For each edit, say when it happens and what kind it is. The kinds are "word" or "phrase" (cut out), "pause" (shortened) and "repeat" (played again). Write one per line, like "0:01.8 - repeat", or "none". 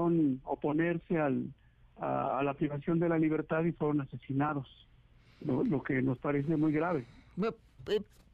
none